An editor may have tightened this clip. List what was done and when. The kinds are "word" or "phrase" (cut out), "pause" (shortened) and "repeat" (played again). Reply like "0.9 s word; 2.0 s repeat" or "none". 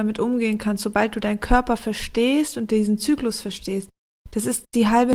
none